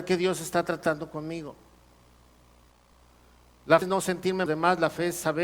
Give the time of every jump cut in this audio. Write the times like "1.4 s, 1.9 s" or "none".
3.8 s, 4.5 s